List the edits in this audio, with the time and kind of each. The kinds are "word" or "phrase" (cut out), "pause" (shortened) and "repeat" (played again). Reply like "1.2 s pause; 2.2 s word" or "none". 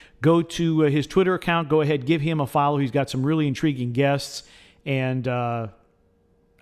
none